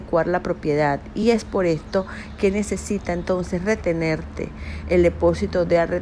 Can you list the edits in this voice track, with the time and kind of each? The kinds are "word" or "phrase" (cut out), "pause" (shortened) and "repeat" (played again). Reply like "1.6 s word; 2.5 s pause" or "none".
none